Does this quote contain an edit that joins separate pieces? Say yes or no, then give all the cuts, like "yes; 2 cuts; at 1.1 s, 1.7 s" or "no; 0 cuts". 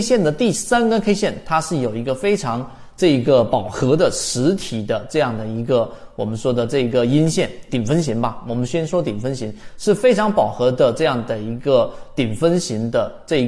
no; 0 cuts